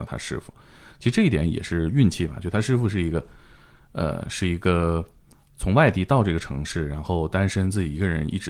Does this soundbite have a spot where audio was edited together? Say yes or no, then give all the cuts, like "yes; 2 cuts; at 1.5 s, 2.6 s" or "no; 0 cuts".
no; 0 cuts